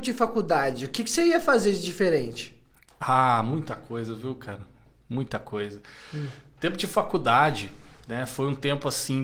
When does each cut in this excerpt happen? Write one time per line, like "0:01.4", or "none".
none